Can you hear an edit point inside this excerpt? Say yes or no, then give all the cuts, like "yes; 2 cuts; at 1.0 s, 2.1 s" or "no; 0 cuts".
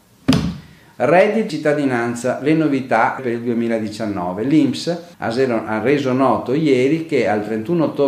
yes; 3 cuts; at 1.5 s, 3.2 s, 5.1 s